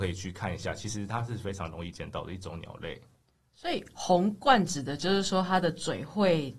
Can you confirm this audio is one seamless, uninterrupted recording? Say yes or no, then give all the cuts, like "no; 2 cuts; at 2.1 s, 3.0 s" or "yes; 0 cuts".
yes; 0 cuts